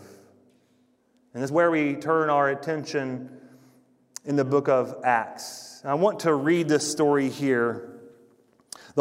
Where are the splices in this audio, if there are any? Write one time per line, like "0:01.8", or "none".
0:01.5